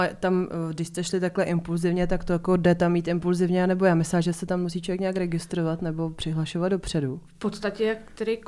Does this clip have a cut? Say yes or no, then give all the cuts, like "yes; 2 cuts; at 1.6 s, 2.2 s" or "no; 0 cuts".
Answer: no; 0 cuts